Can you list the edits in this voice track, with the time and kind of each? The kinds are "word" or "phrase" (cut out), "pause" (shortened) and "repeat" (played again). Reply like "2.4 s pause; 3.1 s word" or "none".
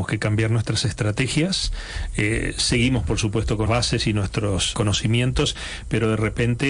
3.7 s word; 4.7 s word